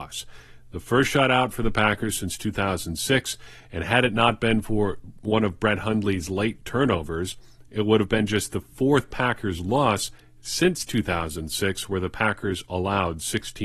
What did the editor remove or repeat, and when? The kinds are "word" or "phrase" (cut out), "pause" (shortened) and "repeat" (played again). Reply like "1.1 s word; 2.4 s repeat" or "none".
none